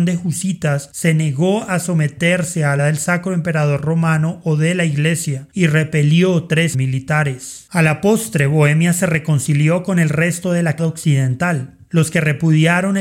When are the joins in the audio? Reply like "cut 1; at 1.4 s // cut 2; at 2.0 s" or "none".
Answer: cut 1; at 2.8 s // cut 2; at 6.7 s // cut 3; at 10.8 s